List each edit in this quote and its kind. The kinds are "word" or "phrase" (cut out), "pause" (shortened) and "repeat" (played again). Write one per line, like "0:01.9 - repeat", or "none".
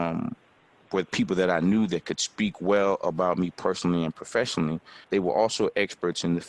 0:05.0 - pause

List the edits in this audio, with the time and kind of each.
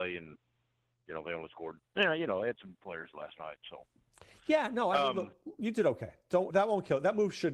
0:01.8 - pause
0:02.8 - word
0:06.5 - word

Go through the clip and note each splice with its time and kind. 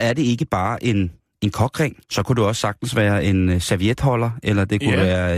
0:01.2 - pause
0:02.0 - pause

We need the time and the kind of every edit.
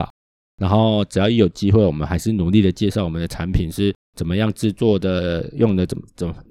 0:04.0 - pause

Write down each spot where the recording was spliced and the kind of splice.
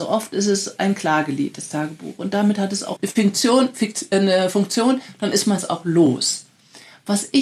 0:03.0 - word

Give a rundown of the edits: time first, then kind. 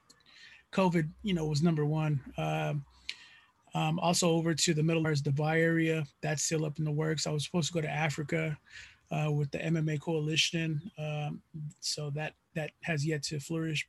0:05.0 - phrase
0:06.1 - pause
0:12.7 - pause

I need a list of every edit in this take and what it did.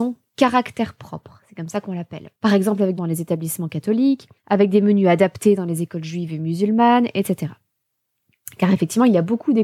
0:02.3 - pause
0:03.0 - phrase
0:04.4 - pause

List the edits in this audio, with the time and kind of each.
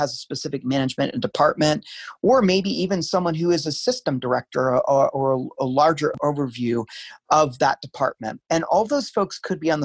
0:08.5 - pause

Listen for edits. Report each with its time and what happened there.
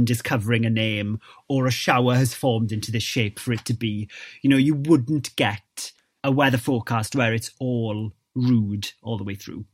none

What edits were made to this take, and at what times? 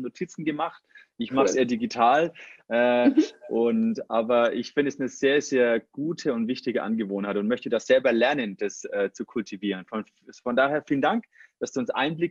none

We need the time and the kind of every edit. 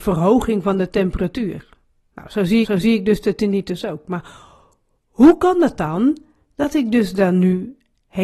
0:02.6 - repeat

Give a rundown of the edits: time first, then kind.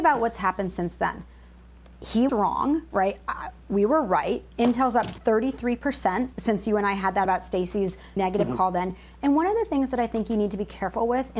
0:02.3 - word
0:06.3 - word
0:07.2 - word
0:08.2 - word

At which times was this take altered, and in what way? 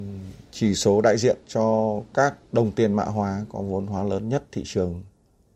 0:01.4 - pause
0:02.4 - pause

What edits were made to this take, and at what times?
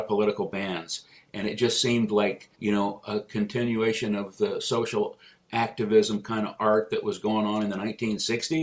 0:02.5 - pause

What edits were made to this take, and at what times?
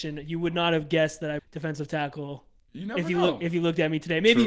0:01.4 - word

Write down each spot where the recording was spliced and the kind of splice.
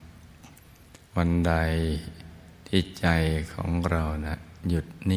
0:01.1 - pause

